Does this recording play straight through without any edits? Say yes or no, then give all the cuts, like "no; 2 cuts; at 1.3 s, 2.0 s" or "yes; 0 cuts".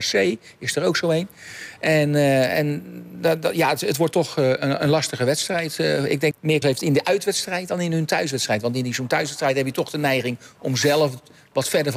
no; 2 cuts; at 6.3 s, 6.6 s